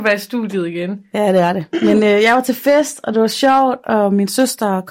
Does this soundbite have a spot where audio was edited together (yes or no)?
no